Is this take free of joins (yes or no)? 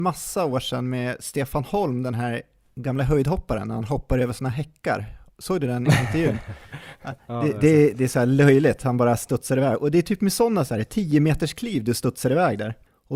yes